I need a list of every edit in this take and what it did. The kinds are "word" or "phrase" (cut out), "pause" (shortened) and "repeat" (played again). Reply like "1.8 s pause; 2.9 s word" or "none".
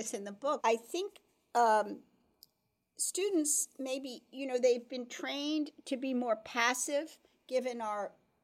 none